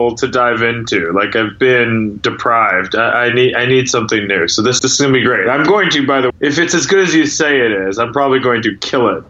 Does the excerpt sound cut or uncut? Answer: cut